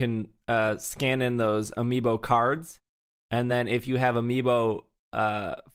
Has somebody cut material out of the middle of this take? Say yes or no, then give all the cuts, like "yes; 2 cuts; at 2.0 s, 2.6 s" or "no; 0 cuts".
no; 0 cuts